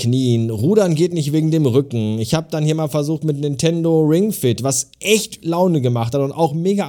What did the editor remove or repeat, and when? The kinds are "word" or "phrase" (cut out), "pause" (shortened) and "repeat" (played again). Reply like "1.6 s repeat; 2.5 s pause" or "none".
5.4 s word